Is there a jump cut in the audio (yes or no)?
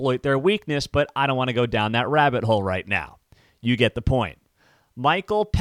no